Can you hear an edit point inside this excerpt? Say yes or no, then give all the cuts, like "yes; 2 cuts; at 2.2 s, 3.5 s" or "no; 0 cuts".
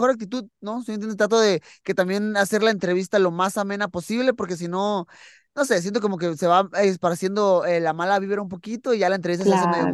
no; 0 cuts